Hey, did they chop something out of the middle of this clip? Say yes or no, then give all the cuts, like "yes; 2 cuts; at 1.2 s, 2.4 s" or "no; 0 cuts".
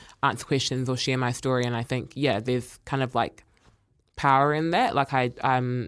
no; 0 cuts